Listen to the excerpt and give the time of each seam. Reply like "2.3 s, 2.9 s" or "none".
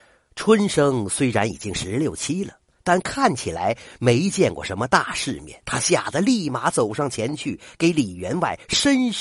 5.6 s